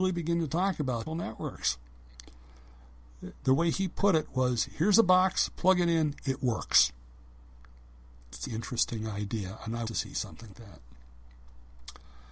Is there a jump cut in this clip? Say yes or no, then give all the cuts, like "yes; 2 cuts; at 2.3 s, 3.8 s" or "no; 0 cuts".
yes; 4 cuts; at 1.1 s, 8.5 s, 9.9 s, 10.5 s